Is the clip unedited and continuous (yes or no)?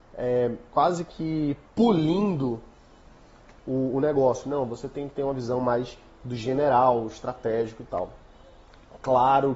yes